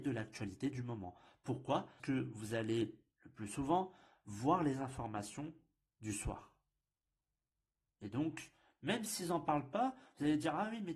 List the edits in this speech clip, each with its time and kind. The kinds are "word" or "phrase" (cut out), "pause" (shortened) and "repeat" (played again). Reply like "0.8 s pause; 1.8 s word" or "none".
2.0 s word